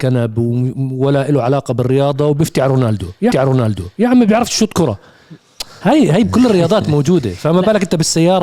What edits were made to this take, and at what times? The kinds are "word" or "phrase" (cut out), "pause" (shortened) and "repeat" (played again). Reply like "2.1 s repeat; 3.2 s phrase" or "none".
3.3 s repeat